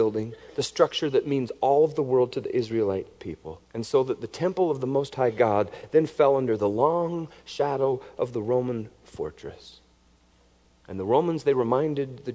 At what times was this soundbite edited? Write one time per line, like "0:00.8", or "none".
0:03.6